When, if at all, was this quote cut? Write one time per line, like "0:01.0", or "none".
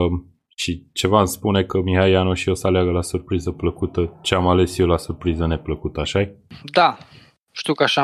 none

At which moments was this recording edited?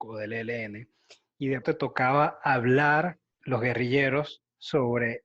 0:01.6
0:03.3

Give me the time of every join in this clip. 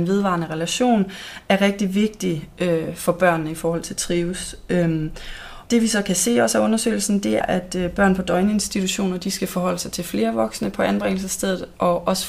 0:05.7
0:07.4

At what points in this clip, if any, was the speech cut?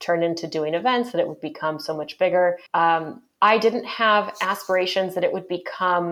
0:02.7

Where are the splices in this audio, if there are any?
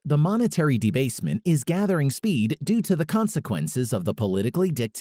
none

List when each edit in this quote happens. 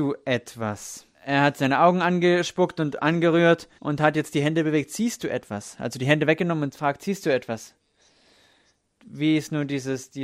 0:01.1
0:03.8

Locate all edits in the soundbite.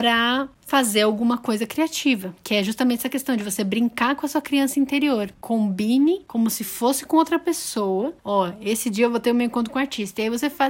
0:05.4
0:08.2

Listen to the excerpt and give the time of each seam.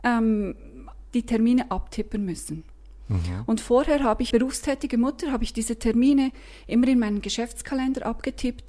0:01.1
0:04.3

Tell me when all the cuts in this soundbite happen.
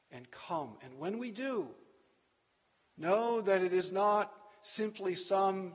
none

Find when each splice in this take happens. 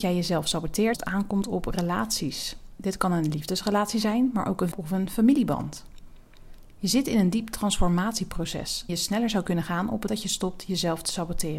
0:00.9
0:04.7
0:08.9
0:10.1

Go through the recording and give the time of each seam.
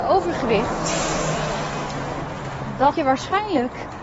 0:02.9

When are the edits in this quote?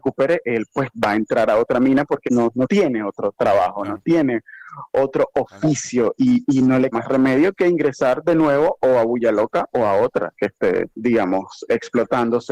0:02.3
0:06.9
0:10.3
0:10.9

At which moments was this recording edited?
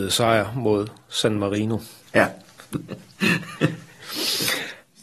0:02.0

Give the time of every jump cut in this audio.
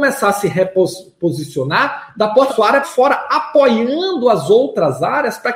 0:02.5
0:02.8

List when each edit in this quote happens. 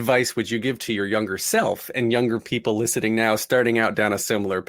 none

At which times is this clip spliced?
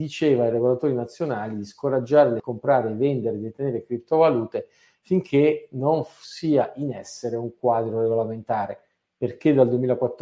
0:02.4

